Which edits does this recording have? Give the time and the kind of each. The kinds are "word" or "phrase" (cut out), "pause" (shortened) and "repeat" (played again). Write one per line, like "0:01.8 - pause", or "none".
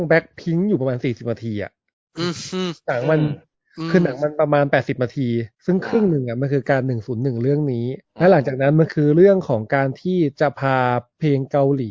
0:05.5 - pause
0:08.0 - pause